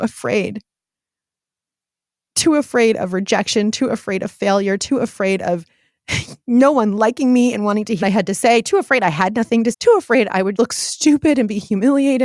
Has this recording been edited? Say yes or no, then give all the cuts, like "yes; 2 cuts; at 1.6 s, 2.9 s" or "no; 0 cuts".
yes; 3 cuts; at 8.0 s, 9.7 s, 10.6 s